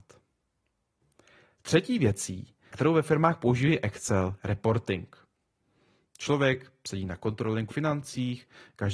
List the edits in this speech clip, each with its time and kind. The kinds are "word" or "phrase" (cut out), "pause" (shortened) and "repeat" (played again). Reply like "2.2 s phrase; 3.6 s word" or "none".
2.7 s word; 4.4 s word; 7.7 s word